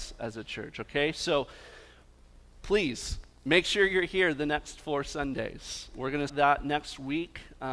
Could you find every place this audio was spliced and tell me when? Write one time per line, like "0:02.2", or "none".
0:06.3